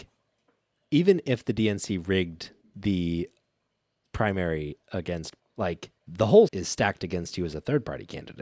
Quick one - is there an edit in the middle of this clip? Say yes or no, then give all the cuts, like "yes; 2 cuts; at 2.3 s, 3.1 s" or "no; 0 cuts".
yes; 4 cuts; at 2.6 s, 5.4 s, 6.0 s, 6.5 s